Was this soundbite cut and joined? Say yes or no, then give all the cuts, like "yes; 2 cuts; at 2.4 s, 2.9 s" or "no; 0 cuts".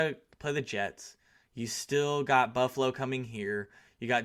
no; 0 cuts